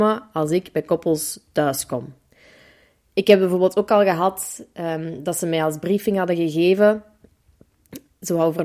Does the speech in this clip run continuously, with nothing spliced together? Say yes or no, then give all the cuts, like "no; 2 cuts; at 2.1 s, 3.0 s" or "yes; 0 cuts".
yes; 0 cuts